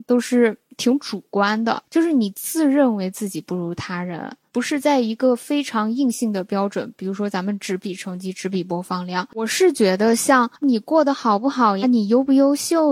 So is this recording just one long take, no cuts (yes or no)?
no